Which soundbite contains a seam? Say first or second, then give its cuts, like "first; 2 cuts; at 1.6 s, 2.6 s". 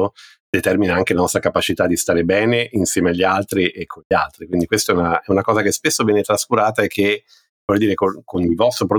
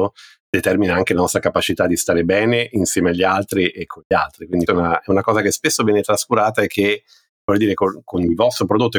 second; 1 cut; at 4.7 s